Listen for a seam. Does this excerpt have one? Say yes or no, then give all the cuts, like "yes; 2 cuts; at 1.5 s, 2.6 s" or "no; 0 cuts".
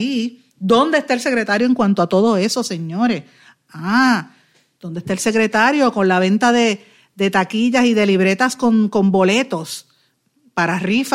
no; 0 cuts